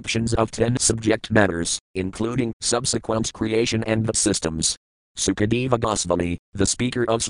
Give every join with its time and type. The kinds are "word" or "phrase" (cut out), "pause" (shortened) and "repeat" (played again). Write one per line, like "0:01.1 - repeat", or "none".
0:02.5 - word
0:04.1 - word